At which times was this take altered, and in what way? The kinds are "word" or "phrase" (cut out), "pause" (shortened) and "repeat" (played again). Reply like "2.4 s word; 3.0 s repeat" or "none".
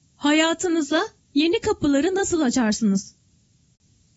none